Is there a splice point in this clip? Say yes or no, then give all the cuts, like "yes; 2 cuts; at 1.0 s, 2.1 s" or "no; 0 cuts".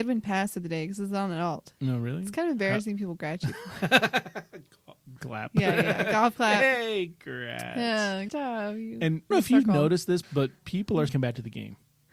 yes; 6 cuts; at 1.8 s, 5.2 s, 8.3 s, 9.3 s, 10.2 s, 11.1 s